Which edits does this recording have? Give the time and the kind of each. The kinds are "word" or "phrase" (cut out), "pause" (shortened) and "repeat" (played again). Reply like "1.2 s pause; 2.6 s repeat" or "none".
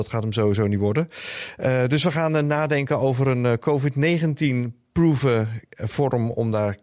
none